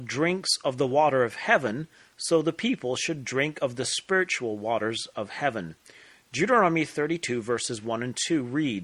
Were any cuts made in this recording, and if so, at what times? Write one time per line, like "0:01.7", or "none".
none

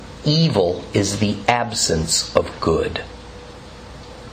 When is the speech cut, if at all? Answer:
none

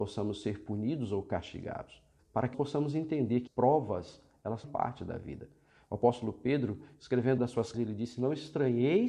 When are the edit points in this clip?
0:02.2
0:02.5
0:03.5
0:04.6
0:07.4
0:07.7

